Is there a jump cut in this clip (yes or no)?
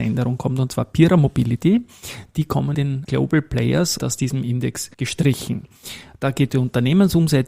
yes